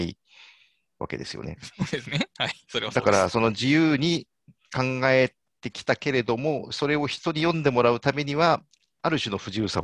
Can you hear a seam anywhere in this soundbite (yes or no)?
yes